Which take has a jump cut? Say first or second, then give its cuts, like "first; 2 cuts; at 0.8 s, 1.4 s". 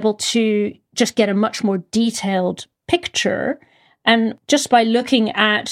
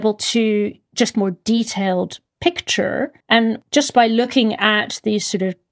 second; 2 cuts; at 1.1 s, 3.2 s